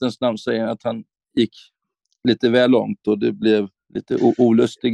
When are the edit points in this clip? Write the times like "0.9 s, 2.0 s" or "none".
none